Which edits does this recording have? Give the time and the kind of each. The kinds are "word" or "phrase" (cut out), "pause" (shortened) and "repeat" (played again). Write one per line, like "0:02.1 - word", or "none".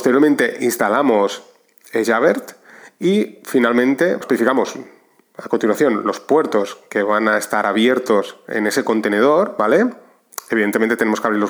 0:04.2 - word